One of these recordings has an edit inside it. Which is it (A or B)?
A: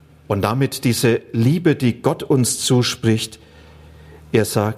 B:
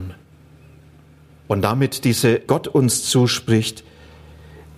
B